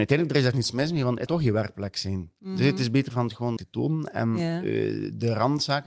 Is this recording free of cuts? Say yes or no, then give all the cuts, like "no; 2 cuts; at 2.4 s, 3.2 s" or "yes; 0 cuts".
no; 2 cuts; at 1.3 s, 3.6 s